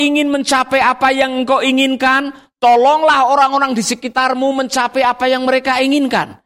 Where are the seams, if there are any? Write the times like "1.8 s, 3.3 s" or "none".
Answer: none